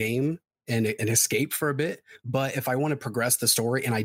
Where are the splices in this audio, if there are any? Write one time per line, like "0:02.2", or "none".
0:01.0